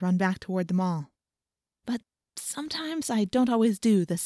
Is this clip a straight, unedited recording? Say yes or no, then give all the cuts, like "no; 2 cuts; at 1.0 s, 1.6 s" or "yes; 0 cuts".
yes; 0 cuts